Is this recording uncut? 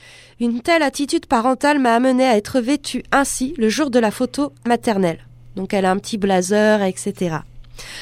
no; 1 cut; at 4.7 s

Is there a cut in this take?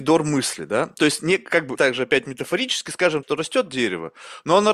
yes; 2 cuts; at 1.7 s, 3.2 s

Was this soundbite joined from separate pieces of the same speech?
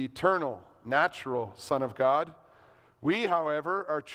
no; 0 cuts

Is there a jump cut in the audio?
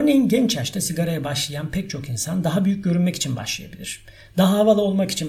no; 0 cuts

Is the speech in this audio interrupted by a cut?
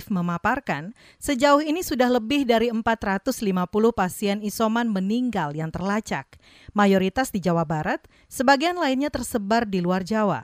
no; 0 cuts

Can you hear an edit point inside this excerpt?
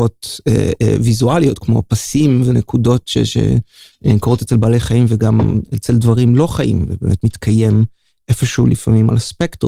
no; 0 cuts

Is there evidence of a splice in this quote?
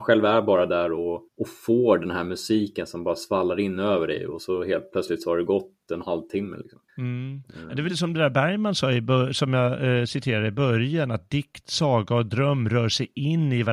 yes; 3 cuts; at 1.3 s, 6.9 s, 7.9 s

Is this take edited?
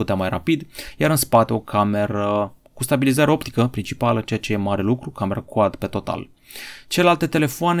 no; 0 cuts

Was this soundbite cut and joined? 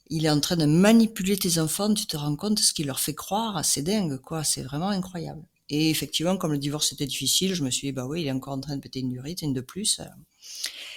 no; 0 cuts

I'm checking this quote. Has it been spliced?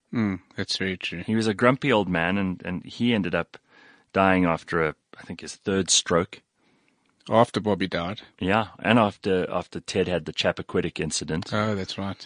no; 0 cuts

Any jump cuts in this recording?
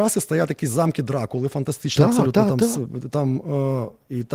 no; 0 cuts

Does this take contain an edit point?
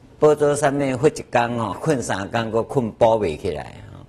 yes; 1 cut; at 1.7 s

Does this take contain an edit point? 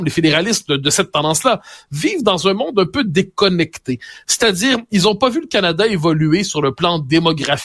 no; 0 cuts

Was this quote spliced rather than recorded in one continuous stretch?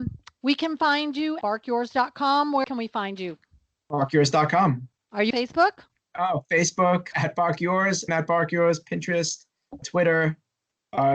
yes; 6 cuts; at 1.4 s, 2.6 s, 5.3 s, 7.1 s, 8.1 s, 9.8 s

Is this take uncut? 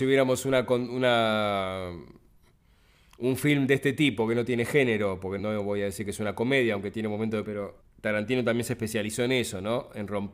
no; 3 cuts; at 5.4 s, 7.4 s, 7.8 s

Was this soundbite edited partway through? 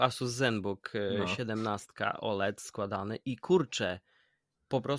no; 0 cuts

